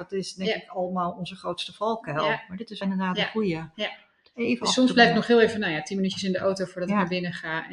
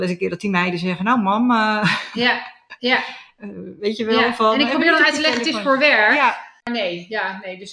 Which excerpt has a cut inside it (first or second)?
first